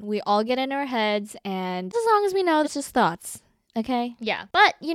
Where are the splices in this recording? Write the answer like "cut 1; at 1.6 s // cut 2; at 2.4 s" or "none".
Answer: cut 1; at 1.9 s // cut 2; at 2.6 s

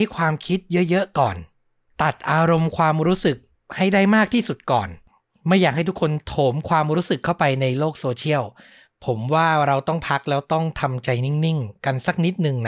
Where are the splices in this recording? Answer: none

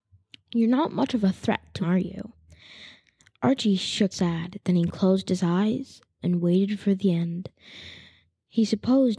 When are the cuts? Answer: cut 1; at 1.8 s // cut 2; at 4.1 s // cut 3; at 6.2 s

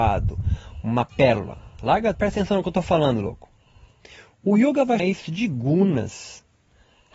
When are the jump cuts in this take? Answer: cut 1; at 2.1 s // cut 2; at 5.0 s

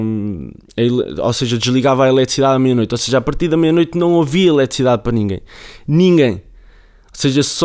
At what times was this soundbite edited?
none

